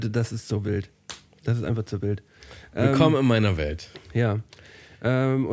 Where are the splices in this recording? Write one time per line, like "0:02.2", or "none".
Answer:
none